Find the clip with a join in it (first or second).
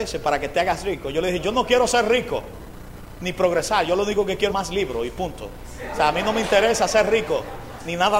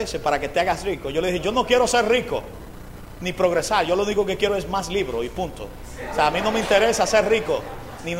first